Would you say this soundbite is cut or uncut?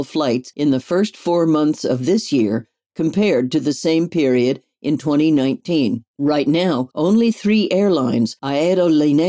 uncut